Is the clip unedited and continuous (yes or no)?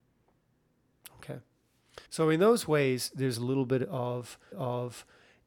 no